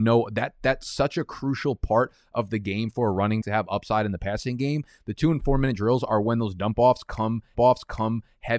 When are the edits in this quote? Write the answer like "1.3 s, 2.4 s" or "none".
3.4 s, 7.5 s